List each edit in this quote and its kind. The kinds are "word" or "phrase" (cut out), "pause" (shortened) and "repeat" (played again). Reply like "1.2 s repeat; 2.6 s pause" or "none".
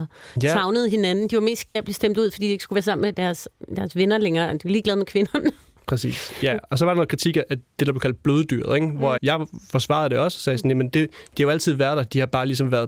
1.7 s word; 9.2 s word

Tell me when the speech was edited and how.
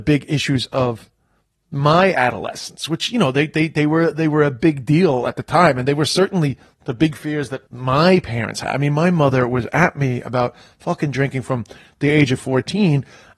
7.7 s pause

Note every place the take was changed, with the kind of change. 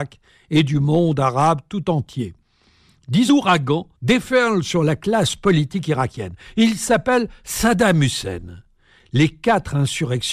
3.3 s phrase; 3.9 s pause

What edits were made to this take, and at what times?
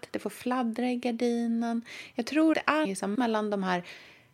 2.5 s word; 2.8 s word; 3.1 s word

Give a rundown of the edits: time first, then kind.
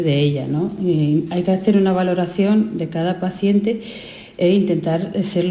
none

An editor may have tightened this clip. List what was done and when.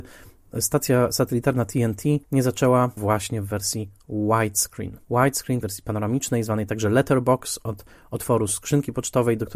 2.2 s pause; 3.0 s phrase; 5.0 s pause; 5.6 s word

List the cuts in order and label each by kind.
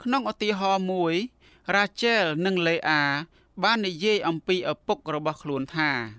none

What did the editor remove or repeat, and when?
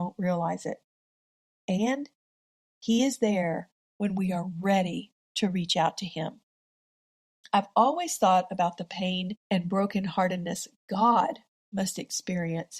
none

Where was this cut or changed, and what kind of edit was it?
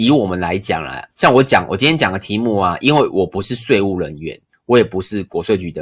1.1 s pause

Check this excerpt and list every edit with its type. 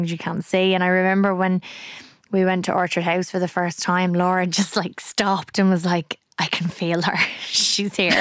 none

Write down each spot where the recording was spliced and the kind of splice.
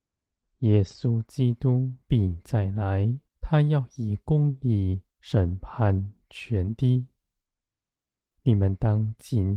3.3 s pause; 5.1 s pause

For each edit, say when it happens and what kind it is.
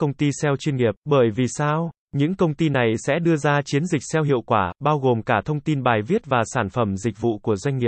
1.0 s pause

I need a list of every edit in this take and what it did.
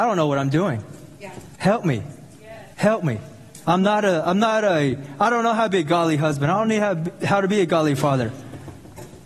1.5 s pause; 2.7 s pause; 3.6 s pause

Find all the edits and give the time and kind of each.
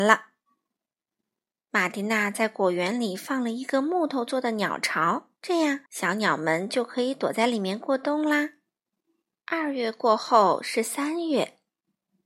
5.4 s pause; 5.9 s pause; 8.9 s pause

